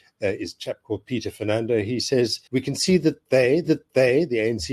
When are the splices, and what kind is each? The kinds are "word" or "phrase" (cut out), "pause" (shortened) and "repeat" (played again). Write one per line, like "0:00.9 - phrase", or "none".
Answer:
0:02.5 - pause
0:03.6 - repeat